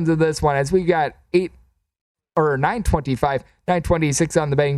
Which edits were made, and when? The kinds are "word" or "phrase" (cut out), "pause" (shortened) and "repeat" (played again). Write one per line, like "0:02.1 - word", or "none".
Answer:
none